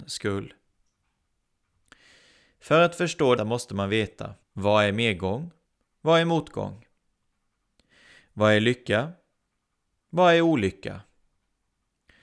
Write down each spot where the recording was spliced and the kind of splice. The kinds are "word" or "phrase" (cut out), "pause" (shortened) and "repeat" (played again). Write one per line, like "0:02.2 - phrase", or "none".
0:03.4 - word
0:04.4 - pause
0:05.7 - pause